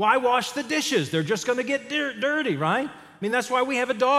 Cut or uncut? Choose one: uncut